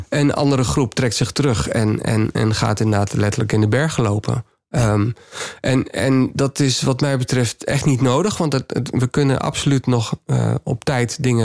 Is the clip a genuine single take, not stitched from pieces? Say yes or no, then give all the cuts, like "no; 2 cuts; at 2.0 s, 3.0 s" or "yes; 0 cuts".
yes; 0 cuts